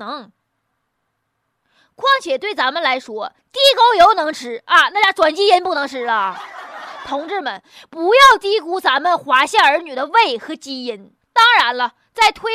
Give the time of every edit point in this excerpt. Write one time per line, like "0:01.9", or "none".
0:11.2